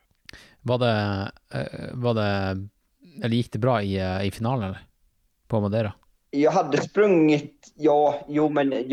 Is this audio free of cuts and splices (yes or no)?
yes